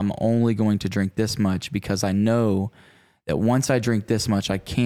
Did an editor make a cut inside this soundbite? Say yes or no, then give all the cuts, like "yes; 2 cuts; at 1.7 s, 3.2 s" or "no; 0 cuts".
no; 0 cuts